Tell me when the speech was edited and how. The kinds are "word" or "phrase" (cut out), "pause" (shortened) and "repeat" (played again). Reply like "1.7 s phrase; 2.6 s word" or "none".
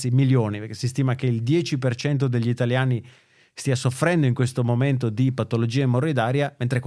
none